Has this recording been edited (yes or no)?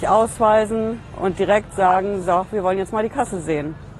no